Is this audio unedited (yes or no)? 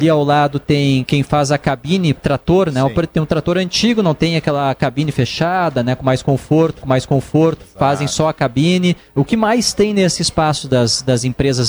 no